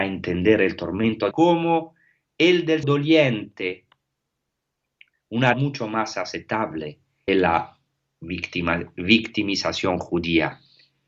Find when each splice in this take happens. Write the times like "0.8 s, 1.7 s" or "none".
1.3 s, 2.8 s, 5.5 s, 7.3 s